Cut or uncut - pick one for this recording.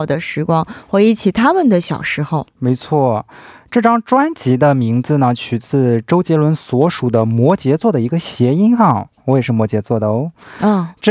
uncut